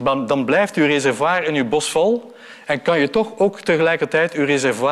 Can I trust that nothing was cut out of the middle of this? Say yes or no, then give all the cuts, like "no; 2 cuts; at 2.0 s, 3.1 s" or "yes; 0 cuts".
yes; 0 cuts